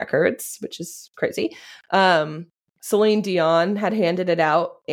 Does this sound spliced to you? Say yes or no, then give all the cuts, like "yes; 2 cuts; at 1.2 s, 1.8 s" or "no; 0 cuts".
no; 0 cuts